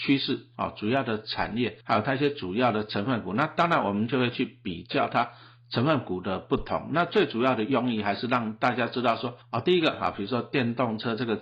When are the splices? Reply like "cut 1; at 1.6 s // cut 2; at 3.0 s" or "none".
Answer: cut 1; at 1.8 s // cut 2; at 9.4 s